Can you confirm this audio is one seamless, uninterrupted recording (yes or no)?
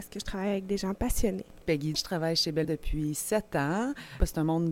no